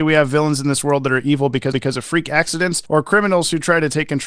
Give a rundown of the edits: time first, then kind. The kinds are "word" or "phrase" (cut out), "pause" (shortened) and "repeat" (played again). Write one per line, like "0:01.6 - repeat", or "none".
0:01.7 - repeat
0:02.9 - pause